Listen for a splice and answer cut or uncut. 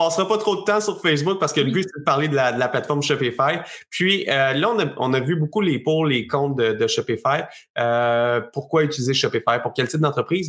uncut